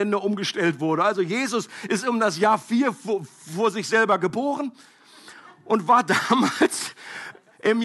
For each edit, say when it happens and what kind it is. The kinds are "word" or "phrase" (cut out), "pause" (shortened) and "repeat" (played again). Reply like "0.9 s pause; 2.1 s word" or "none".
none